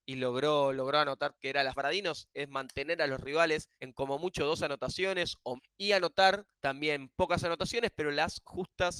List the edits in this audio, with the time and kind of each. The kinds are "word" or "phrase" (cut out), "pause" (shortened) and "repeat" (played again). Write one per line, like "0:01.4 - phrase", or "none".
0:01.3 - word
0:01.7 - phrase
0:03.7 - pause
0:05.6 - word
0:06.5 - pause